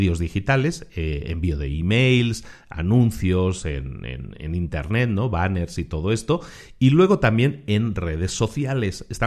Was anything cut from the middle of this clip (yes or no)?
no